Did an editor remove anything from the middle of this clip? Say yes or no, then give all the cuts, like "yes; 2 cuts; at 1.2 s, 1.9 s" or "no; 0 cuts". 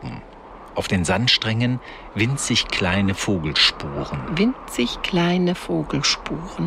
no; 0 cuts